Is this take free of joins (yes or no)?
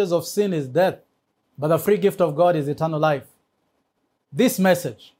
yes